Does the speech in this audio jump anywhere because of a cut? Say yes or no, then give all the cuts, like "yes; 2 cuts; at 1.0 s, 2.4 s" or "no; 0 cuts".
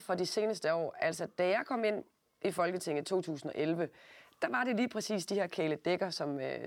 no; 0 cuts